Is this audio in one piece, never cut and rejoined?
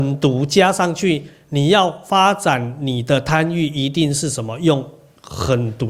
yes; 0 cuts

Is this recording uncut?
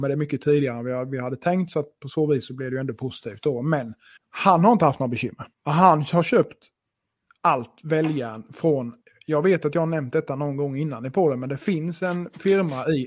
no; 3 cuts; at 4.2 s, 5.5 s, 9.0 s

